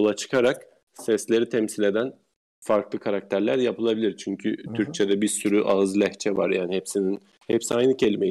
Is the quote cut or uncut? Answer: uncut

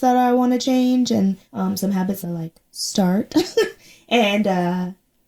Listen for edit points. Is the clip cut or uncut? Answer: cut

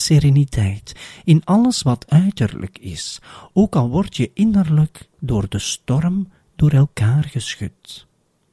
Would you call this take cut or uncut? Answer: uncut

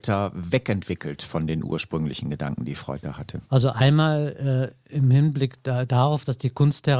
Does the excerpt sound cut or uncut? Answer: cut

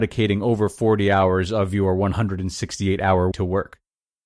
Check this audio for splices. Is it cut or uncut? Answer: cut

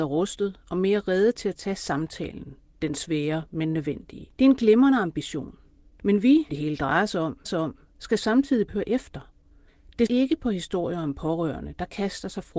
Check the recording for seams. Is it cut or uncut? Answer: cut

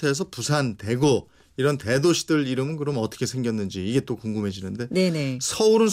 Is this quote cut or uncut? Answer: uncut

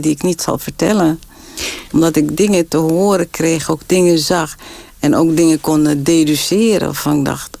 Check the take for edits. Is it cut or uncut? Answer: uncut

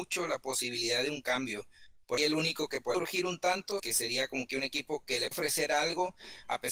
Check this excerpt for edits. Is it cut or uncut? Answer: cut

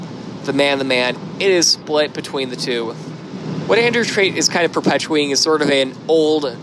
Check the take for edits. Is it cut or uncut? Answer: uncut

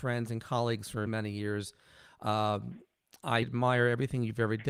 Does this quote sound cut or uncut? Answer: cut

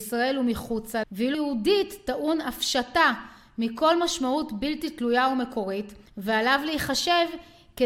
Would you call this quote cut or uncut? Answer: cut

